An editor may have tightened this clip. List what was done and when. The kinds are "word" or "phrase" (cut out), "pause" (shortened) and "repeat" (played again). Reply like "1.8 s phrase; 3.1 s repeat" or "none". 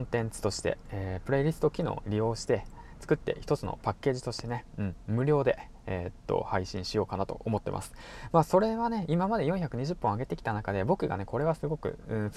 2.0 s word